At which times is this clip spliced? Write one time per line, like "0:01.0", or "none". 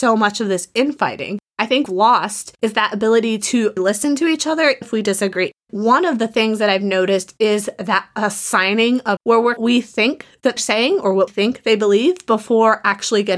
0:01.9
0:03.8
0:04.8
0:09.2
0:09.6
0:10.6
0:11.3